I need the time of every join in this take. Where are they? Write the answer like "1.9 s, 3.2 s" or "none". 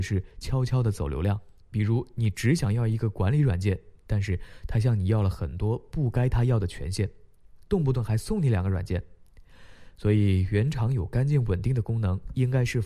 1.6 s